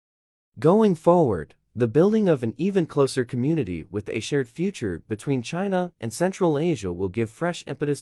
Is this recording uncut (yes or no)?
yes